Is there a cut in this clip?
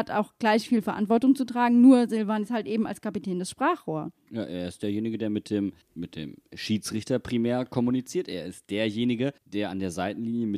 yes; 2 cuts; at 5.8 s, 9.4 s

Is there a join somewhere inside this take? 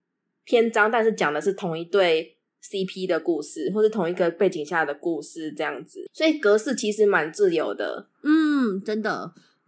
yes; 2 cuts; at 2.5 s, 8.1 s

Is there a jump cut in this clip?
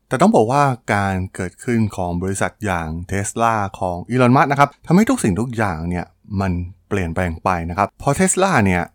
yes; 1 cut; at 7.9 s

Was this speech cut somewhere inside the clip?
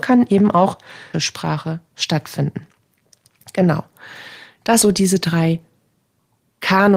yes; 2 cuts; at 1.1 s, 4.8 s

